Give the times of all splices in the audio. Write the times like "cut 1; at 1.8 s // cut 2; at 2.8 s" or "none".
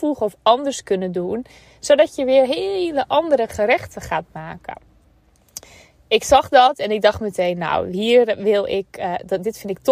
none